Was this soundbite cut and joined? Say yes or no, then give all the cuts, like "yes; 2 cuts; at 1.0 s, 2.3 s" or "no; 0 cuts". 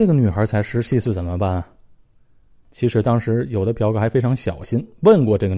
no; 0 cuts